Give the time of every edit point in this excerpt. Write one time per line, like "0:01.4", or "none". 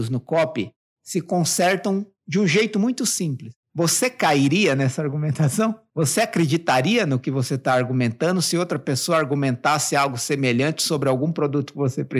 0:02.1
0:03.6